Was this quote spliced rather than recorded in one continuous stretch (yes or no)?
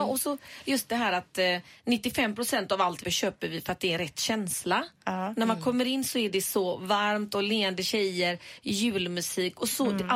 yes